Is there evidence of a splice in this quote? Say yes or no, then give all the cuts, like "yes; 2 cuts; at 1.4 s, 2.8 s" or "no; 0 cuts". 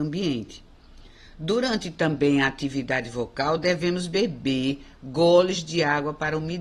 no; 0 cuts